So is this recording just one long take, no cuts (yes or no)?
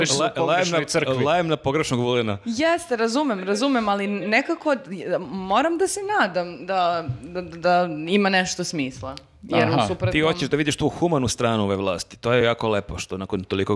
yes